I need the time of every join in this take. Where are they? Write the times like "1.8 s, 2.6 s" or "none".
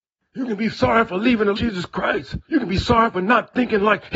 1.5 s, 2.4 s